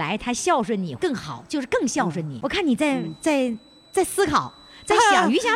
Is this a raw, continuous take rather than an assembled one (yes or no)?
yes